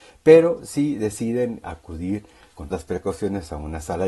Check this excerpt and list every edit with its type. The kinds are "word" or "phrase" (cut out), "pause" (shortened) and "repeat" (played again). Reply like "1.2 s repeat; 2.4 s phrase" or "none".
1.6 s word; 2.7 s word